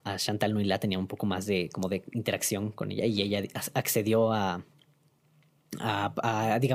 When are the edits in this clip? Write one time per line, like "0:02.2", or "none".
none

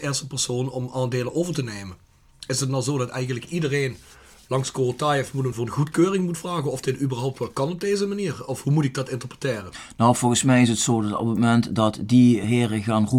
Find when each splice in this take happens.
none

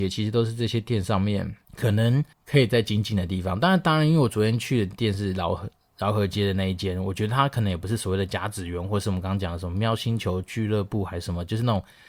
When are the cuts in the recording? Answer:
0:01.6
0:02.3

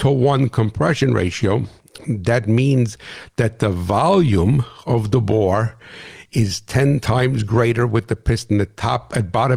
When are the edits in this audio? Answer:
none

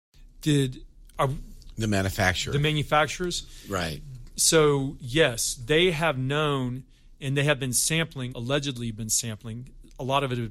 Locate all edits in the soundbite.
0:08.3

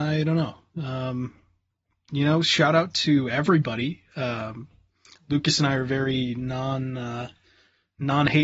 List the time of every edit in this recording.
none

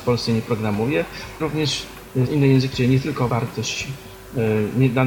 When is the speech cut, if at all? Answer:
0:01.4
0:02.3
0:02.7
0:03.3

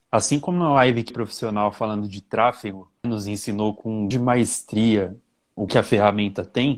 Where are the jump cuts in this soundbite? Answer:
0:01.1
0:03.0
0:04.1
0:05.7

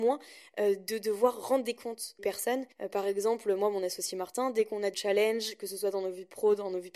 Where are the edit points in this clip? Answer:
0:02.2
0:02.7
0:04.9

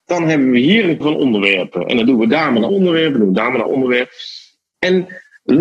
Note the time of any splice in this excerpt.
0:01.0
0:02.7
0:03.7

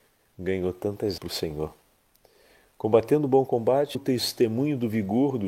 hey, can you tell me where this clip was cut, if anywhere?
0:01.2
0:03.9

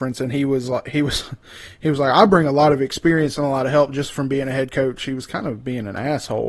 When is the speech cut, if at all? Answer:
none

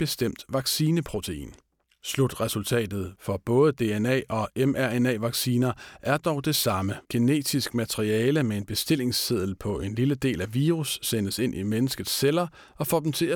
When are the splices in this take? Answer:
0:01.8
0:07.0

